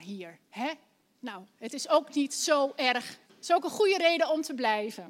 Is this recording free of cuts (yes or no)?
no